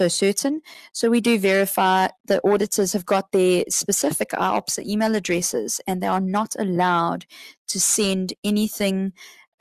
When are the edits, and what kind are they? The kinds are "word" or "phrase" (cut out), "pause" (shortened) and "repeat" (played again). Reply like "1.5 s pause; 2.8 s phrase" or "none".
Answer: none